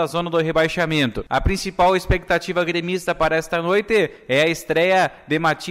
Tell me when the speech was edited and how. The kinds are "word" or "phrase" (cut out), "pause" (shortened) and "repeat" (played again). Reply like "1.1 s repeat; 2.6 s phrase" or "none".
none